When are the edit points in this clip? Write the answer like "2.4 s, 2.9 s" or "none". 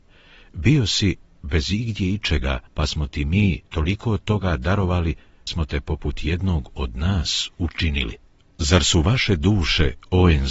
2.7 s, 3.7 s, 5.5 s, 8.4 s